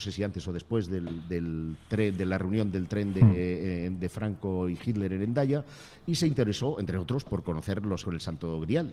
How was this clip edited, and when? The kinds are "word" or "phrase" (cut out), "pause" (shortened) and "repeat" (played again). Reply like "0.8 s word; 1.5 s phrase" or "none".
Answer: 8.0 s phrase